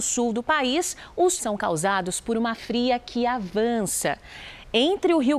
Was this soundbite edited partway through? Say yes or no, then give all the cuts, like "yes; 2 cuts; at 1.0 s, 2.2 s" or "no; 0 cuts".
yes; 2 cuts; at 1.4 s, 2.6 s